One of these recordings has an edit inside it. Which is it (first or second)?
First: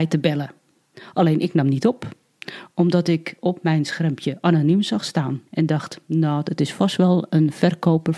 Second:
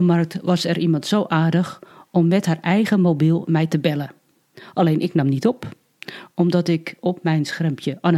first